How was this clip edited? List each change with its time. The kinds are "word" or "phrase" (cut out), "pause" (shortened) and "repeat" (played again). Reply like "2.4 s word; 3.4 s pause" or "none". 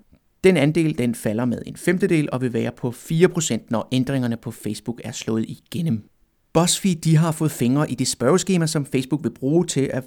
none